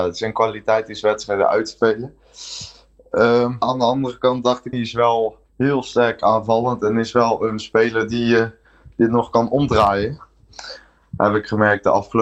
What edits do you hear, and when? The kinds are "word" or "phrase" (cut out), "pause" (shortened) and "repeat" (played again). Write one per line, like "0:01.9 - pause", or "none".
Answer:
0:03.6 - word
0:04.7 - phrase
0:05.5 - pause